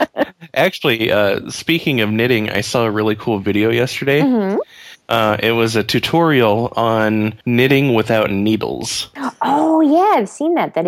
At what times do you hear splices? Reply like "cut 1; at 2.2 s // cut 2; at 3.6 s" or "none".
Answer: cut 1; at 5.0 s // cut 2; at 7.4 s